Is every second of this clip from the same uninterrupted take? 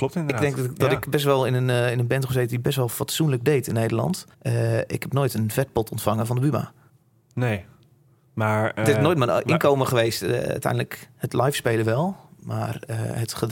no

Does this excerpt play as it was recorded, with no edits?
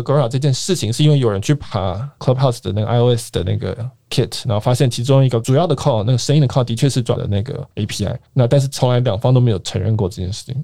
no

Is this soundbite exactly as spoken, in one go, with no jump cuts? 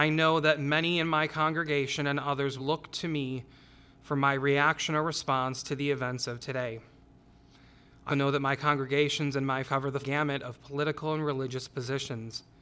no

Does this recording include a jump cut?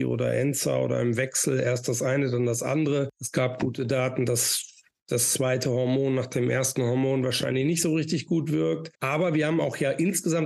no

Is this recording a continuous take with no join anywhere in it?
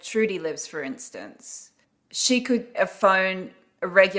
no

